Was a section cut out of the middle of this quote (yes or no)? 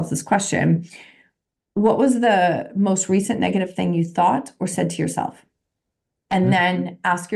no